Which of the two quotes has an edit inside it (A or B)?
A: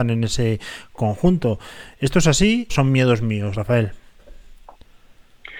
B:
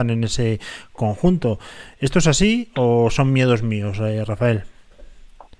A